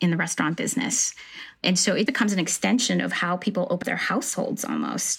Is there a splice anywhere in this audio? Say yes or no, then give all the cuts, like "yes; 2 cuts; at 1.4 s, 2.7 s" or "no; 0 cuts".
yes; 2 cuts; at 2.1 s, 3.8 s